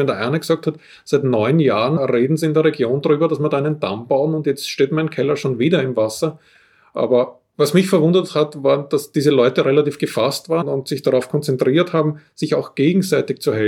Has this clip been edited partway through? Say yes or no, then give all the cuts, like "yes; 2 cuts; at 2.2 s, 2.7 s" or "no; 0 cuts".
no; 0 cuts